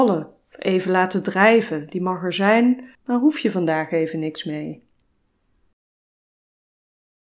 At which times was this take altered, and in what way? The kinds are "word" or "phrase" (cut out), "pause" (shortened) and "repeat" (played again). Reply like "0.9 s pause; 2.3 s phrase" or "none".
2.9 s pause